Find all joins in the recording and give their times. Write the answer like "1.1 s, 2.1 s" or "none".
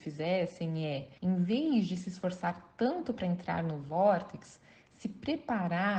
1.2 s